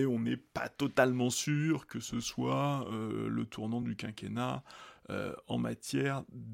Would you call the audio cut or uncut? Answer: uncut